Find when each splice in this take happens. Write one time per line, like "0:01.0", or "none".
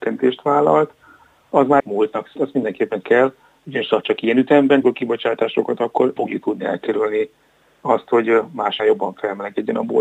0:01.8
0:02.4
0:03.0
0:04.8
0:06.2
0:08.8